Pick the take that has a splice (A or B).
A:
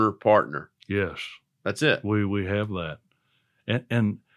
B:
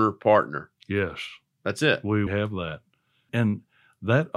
B